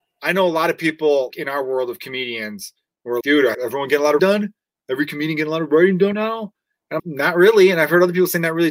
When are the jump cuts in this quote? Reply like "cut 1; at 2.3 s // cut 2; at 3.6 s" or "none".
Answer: cut 1; at 1.3 s // cut 2; at 3.2 s // cut 3; at 3.5 s // cut 4; at 4.2 s // cut 5; at 6.1 s // cut 6; at 7.0 s